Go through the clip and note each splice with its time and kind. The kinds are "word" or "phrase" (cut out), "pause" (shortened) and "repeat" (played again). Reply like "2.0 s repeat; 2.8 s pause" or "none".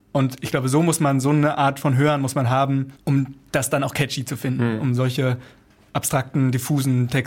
3.0 s pause